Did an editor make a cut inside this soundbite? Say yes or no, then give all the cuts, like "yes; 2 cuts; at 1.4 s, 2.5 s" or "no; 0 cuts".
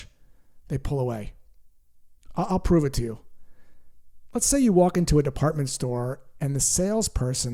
no; 0 cuts